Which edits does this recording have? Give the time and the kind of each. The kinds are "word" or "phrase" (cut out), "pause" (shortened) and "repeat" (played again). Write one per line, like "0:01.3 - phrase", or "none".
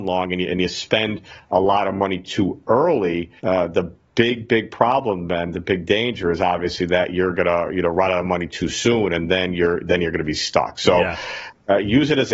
0:03.4 - pause